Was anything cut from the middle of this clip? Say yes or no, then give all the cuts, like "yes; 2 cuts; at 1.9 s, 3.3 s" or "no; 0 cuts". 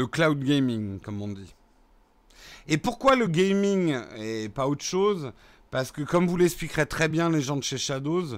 no; 0 cuts